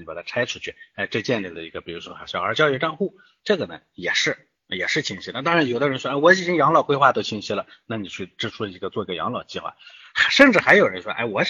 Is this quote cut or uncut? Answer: uncut